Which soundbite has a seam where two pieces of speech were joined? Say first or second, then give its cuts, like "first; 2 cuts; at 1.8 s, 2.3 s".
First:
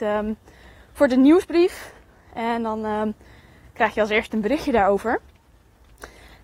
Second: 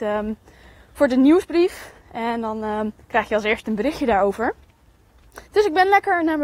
second; 3 cuts; at 2.0 s, 3.0 s, 5.5 s